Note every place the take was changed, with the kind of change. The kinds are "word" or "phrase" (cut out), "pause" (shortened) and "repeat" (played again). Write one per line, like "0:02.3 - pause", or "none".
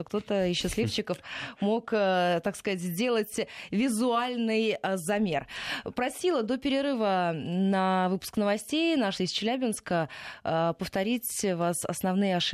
0:09.2 - word